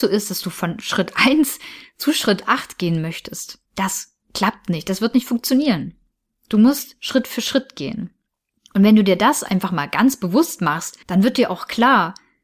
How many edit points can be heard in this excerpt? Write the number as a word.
two